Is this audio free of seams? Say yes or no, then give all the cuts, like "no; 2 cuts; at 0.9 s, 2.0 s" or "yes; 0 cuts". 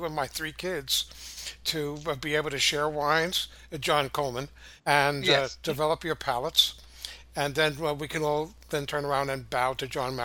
no; 1 cut; at 4.8 s